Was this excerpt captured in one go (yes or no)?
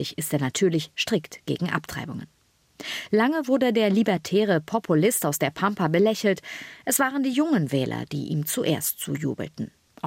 yes